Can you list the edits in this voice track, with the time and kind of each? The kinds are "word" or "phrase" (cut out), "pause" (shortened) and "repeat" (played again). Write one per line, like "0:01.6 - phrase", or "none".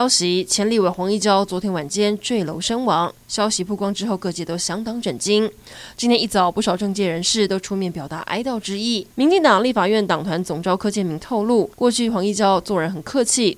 0:09.1 - pause
0:11.7 - pause